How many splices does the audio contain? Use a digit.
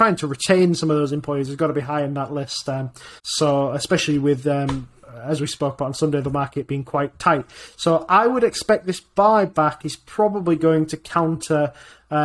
2